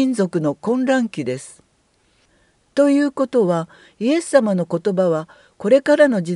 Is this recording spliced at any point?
no; 0 cuts

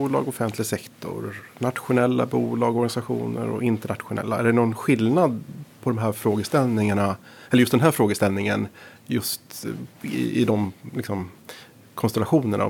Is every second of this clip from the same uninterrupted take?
yes; 0 cuts

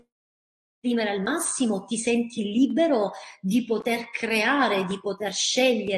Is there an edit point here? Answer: no; 0 cuts

